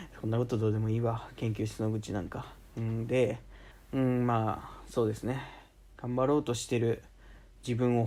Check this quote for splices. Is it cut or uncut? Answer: cut